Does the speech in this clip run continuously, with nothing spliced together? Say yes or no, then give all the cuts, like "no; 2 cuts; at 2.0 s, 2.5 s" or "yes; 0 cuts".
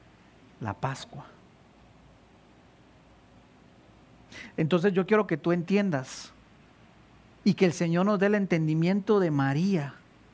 yes; 0 cuts